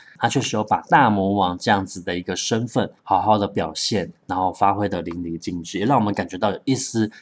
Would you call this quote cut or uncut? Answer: cut